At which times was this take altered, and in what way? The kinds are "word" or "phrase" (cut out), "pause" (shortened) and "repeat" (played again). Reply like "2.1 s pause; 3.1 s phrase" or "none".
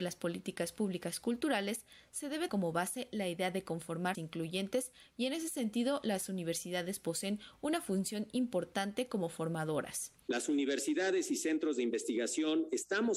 2.5 s word; 4.1 s word

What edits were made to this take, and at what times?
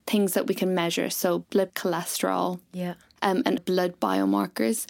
1.7 s word; 3.6 s word

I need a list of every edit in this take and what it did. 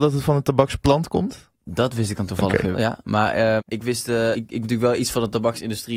2.7 s word; 3.6 s word; 4.3 s word; 4.6 s word

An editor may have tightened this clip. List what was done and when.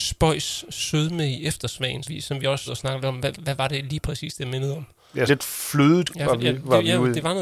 2.0 s word; 2.7 s word; 3.3 s word; 5.3 s word; 6.1 s word

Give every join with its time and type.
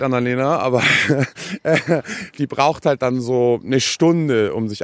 none

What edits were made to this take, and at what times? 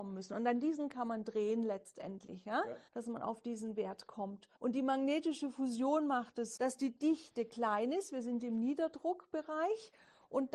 2.9 s pause; 4.5 s pause; 6.6 s word

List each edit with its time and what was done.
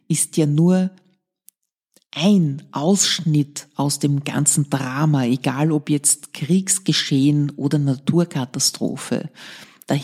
none

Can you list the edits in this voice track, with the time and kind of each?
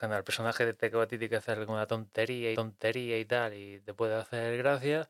2.5 s repeat

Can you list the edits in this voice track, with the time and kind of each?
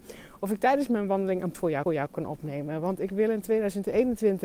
1.5 s word; 1.9 s repeat

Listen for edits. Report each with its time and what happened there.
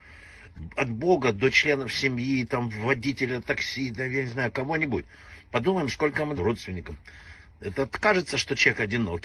6.4 s phrase

